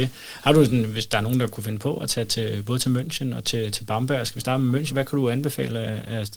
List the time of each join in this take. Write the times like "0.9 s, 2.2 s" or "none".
4.9 s